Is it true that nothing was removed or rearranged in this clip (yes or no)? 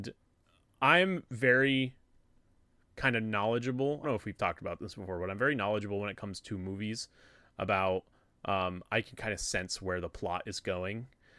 no